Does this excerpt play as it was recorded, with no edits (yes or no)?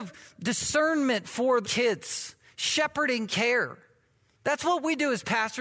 no